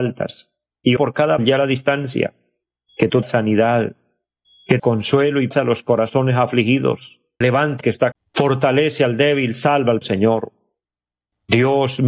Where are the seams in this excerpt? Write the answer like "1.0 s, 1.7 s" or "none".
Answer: 1.0 s, 1.4 s, 3.2 s, 4.8 s, 5.5 s, 7.4 s, 7.8 s, 8.1 s, 10.0 s